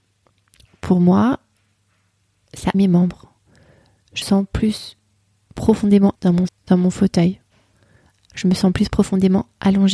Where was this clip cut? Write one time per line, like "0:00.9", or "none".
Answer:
0:02.7
0:04.2
0:06.1
0:06.5